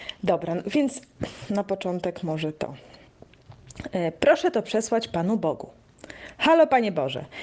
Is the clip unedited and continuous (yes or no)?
yes